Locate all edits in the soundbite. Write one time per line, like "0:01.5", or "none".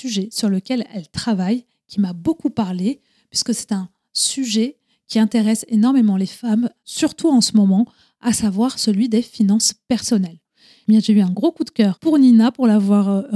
none